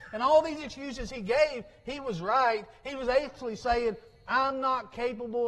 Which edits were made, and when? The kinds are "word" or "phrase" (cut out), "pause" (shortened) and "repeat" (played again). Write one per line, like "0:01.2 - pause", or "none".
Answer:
none